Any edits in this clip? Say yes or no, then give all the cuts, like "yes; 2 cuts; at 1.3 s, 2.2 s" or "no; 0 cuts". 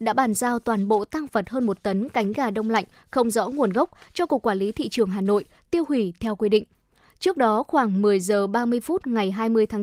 no; 0 cuts